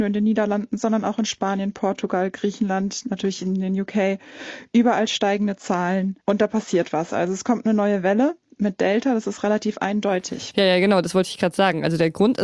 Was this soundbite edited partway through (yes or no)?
yes